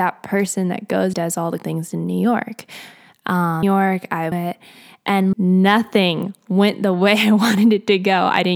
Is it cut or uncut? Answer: cut